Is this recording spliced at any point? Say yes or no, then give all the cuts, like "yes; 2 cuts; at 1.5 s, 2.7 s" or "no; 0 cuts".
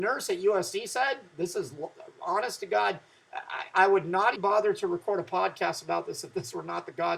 yes; 1 cut; at 4.4 s